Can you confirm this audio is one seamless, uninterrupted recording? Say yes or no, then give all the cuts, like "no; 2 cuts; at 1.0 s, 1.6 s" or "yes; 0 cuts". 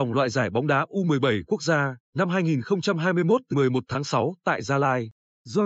no; 1 cut; at 3.5 s